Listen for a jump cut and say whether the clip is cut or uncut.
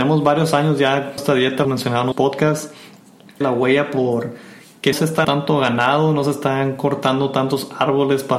cut